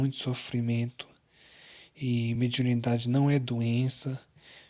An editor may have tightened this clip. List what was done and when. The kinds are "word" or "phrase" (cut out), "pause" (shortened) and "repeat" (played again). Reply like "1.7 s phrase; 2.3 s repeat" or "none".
none